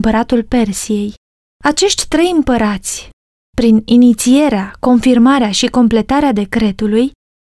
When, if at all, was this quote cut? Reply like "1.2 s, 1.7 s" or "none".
none

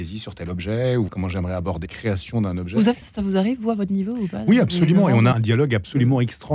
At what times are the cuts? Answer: 1.1 s, 1.9 s, 3.0 s, 5.3 s

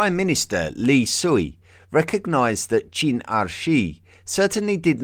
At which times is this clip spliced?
none

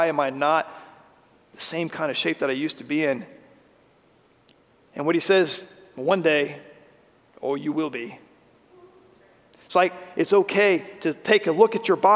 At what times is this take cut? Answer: none

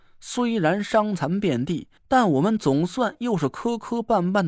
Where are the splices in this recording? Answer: 2.0 s

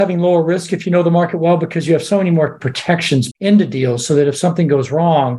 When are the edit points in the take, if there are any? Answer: 3.3 s

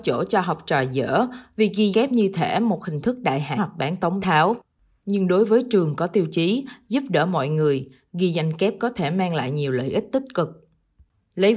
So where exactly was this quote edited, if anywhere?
1.9 s, 3.6 s, 4.2 s

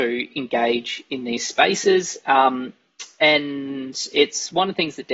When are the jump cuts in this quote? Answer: none

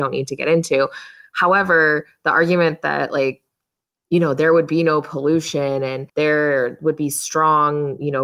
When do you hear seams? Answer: 6.1 s

